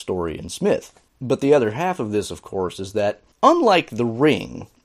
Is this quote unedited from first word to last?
no; 2 cuts; at 1.1 s, 3.3 s

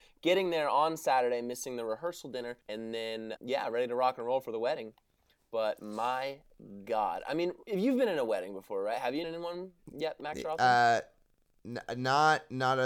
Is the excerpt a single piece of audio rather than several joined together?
no; 3 cuts; at 2.6 s, 3.4 s, 9.2 s

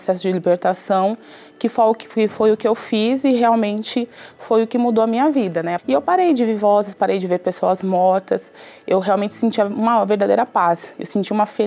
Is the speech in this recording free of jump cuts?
yes; 0 cuts

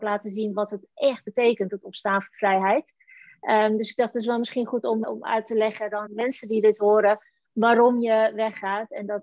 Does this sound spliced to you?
yes; 2 cuts; at 5.0 s, 6.1 s

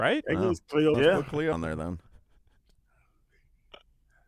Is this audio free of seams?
no; 2 cuts; at 0.9 s, 1.5 s

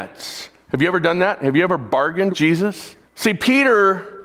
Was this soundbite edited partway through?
yes; 2 cuts; at 2.3 s, 3.1 s

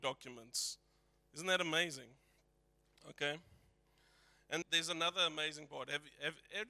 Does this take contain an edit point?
yes; 1 cut; at 4.6 s

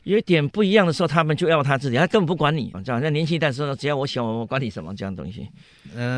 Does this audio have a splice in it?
yes; 1 cut; at 2.7 s

